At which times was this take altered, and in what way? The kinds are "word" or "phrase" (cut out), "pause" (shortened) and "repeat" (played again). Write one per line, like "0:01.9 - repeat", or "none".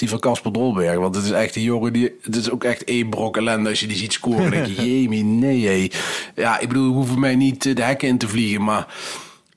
none